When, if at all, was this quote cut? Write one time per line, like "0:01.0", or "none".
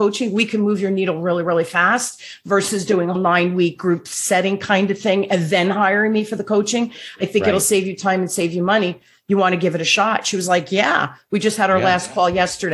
0:03.1